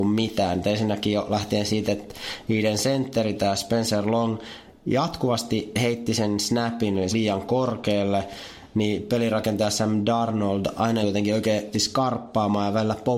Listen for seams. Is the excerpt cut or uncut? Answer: cut